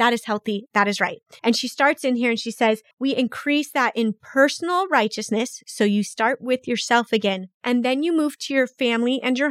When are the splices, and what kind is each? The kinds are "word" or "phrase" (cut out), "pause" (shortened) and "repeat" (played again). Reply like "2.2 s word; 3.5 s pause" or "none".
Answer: 1.4 s pause; 2.9 s pause; 7.5 s pause